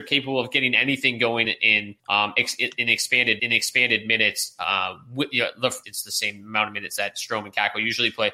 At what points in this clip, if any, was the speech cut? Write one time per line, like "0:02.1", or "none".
0:01.4
0:02.0
0:03.4
0:05.8